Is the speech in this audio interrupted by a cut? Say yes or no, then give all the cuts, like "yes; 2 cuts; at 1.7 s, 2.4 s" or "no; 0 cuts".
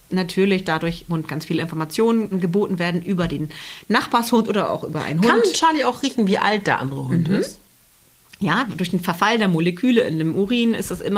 yes; 2 cuts; at 1.1 s, 2.3 s